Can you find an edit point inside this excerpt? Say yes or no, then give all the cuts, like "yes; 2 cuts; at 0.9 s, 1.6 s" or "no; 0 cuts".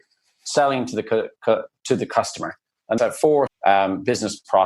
yes; 2 cuts; at 3.0 s, 3.5 s